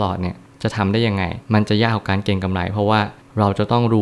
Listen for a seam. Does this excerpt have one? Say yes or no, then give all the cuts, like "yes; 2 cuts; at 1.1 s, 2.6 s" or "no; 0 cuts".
yes; 1 cut; at 1.4 s